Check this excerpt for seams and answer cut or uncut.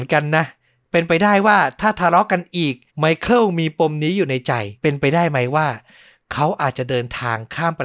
cut